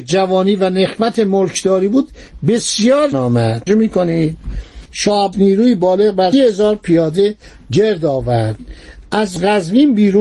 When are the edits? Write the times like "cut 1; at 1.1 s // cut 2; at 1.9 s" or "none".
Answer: cut 1; at 3.1 s // cut 2; at 3.7 s // cut 3; at 5.3 s // cut 4; at 6.3 s

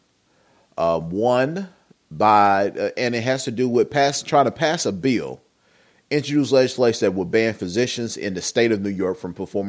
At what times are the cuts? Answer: none

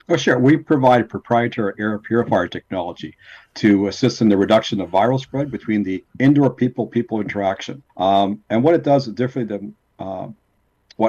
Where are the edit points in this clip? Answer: cut 1; at 6.1 s // cut 2; at 7.9 s

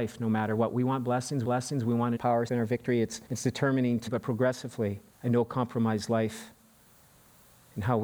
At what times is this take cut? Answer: cut 1; at 1.4 s // cut 2; at 2.2 s // cut 3; at 2.5 s // cut 4; at 3.3 s // cut 5; at 4.1 s // cut 6; at 5.1 s

